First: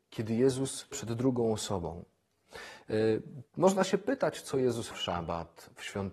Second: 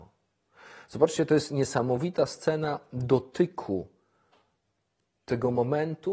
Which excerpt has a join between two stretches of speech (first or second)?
first